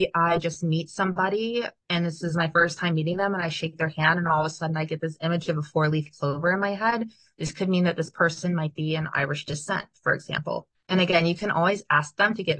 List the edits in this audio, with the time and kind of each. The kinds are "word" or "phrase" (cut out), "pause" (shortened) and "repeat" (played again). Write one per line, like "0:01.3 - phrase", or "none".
none